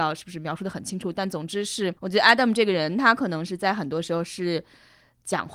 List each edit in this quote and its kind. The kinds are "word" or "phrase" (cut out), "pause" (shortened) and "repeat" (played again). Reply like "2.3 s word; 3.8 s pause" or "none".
2.0 s pause